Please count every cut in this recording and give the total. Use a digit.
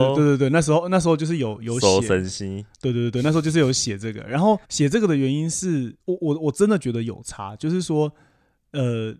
3